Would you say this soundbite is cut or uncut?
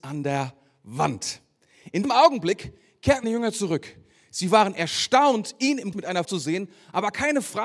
cut